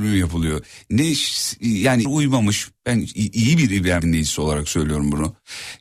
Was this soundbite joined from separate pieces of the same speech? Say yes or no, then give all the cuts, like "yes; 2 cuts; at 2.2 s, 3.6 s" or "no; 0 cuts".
yes; 2 cuts; at 2.0 s, 4.0 s